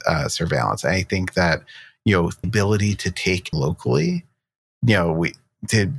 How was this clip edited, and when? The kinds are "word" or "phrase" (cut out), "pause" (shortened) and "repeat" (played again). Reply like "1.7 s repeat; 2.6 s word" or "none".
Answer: 2.4 s word; 3.5 s word